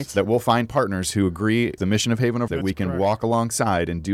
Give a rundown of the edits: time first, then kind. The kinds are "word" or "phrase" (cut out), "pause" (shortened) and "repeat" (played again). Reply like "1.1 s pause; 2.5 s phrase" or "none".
1.8 s word; 2.5 s word